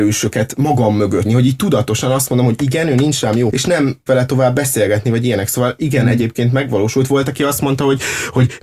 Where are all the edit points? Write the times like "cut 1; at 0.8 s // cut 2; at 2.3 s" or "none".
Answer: cut 1; at 1.2 s // cut 2; at 3.5 s // cut 3; at 4.1 s